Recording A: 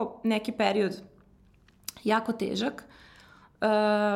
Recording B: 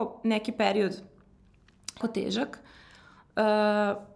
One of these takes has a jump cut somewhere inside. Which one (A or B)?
B